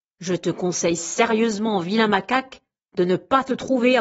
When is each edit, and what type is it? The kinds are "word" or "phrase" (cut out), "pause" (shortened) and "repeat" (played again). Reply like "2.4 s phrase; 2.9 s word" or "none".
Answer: none